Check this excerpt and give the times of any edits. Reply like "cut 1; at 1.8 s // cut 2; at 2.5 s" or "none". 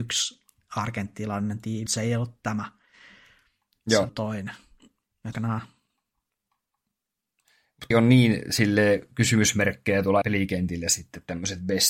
cut 1; at 1.9 s // cut 2; at 4.1 s // cut 3; at 5.3 s // cut 4; at 7.9 s // cut 5; at 10.2 s